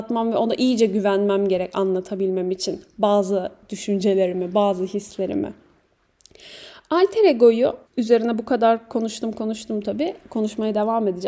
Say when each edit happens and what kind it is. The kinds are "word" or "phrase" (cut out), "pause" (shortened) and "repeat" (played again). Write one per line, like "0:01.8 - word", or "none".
0:07.9 - pause